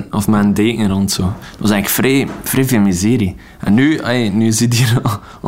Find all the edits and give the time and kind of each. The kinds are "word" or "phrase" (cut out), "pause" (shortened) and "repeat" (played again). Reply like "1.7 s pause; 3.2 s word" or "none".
none